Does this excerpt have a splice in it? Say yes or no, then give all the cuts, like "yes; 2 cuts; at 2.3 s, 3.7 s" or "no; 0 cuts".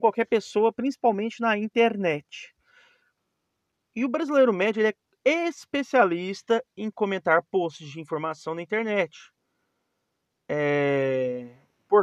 no; 0 cuts